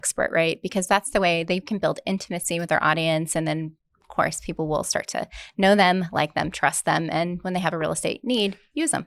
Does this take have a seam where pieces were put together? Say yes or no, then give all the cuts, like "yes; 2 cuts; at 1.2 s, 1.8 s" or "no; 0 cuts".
yes; 1 cut; at 3.9 s